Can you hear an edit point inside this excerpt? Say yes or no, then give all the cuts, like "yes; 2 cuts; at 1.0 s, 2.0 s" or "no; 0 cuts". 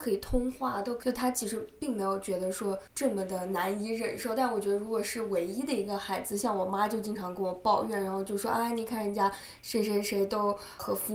yes; 1 cut; at 2.9 s